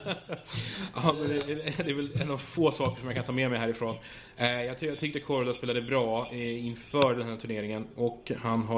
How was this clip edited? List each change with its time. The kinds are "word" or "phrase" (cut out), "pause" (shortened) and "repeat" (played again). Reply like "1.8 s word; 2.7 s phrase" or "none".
none

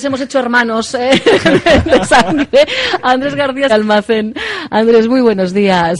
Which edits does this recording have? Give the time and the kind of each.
3.7 s phrase

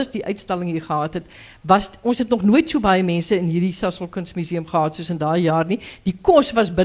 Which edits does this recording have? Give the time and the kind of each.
none

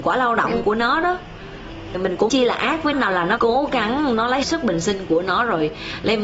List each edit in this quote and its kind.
1.9 s word; 2.3 s word; 2.9 s word; 3.4 s word; 4.4 s word

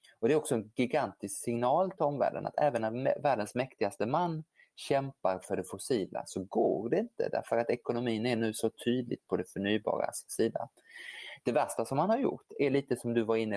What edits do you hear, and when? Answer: none

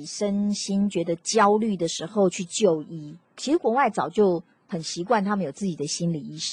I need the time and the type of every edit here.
3.2 s pause

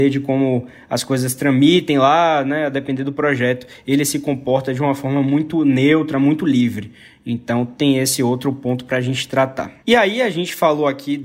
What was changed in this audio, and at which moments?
9.8 s pause

